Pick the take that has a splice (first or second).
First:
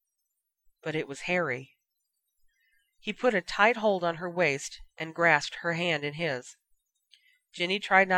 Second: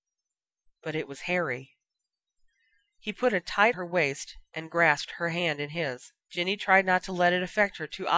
second